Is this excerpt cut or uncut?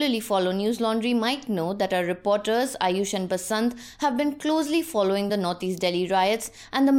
uncut